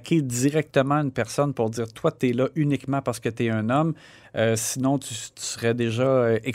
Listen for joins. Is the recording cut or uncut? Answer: uncut